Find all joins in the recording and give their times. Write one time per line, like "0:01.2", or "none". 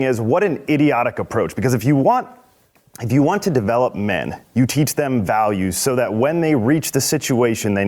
none